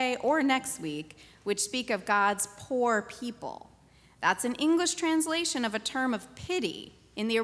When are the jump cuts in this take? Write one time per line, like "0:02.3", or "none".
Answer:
none

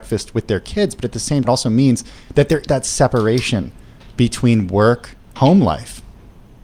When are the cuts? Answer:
0:01.4
0:02.7
0:05.4

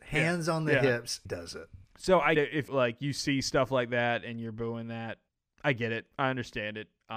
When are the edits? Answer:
0:01.3
0:01.8
0:02.4
0:02.7
0:05.3

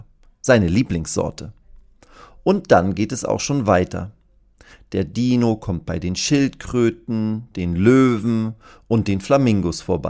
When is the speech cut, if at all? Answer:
none

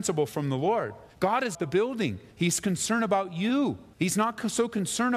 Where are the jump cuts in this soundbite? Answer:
0:01.1
0:01.5
0:02.3
0:03.9

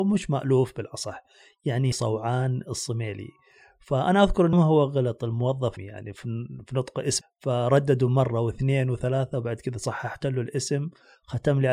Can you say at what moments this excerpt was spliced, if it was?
0:01.9
0:04.5
0:05.8
0:07.2

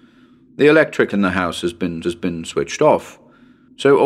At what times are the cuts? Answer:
0:01.1
0:02.0

